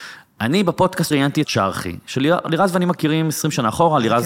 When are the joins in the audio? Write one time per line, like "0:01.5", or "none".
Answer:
0:01.1
0:01.4